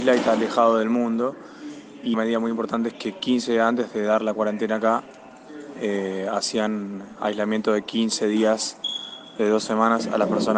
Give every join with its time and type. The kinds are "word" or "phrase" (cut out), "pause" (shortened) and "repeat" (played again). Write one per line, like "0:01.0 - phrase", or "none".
0:02.1 - word